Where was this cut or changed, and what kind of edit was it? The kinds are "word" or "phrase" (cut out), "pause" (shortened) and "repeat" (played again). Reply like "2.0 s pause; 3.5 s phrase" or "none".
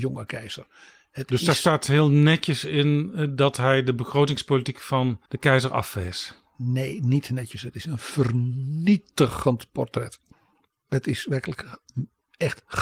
5.3 s pause; 10.3 s pause